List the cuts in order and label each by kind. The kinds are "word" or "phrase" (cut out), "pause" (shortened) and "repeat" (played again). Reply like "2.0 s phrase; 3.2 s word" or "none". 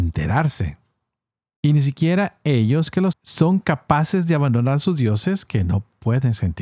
3.1 s word